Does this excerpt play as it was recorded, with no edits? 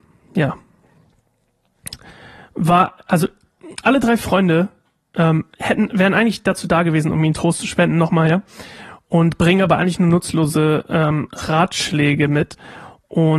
yes; 0 cuts

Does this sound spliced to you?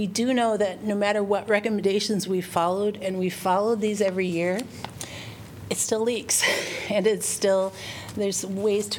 no; 0 cuts

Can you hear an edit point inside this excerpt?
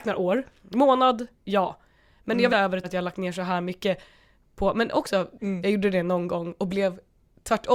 yes; 3 cuts; at 1.4 s, 2.5 s, 2.8 s

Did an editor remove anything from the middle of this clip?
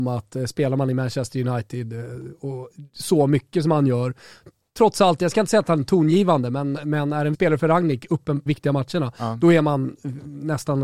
yes; 2 cuts; at 7.3 s, 8.5 s

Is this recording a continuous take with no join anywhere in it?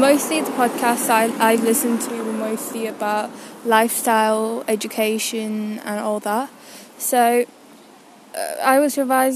yes; 0 cuts

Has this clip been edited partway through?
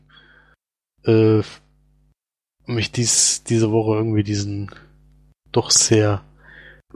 no; 0 cuts

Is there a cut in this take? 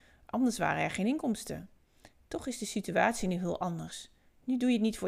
no; 0 cuts

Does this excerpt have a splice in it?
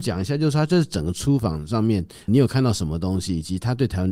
yes; 1 cut; at 2.3 s

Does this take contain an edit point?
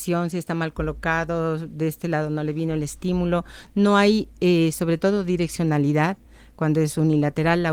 no; 0 cuts

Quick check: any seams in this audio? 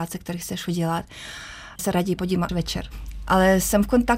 yes; 3 cuts; at 1.8 s, 2.2 s, 2.5 s

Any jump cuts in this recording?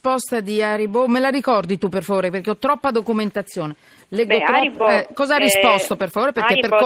no; 0 cuts

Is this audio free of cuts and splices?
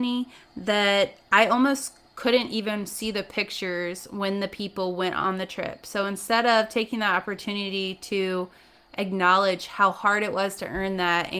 yes; 0 cuts

